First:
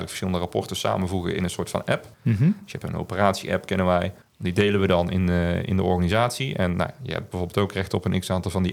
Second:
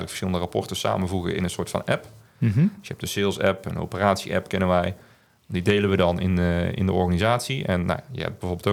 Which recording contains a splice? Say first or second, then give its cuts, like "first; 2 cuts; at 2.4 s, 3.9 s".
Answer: first; 3 cuts; at 2.1 s, 2.8 s, 4.2 s